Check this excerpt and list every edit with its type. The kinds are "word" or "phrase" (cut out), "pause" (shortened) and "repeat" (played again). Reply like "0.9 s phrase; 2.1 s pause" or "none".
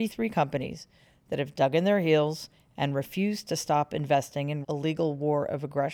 4.6 s word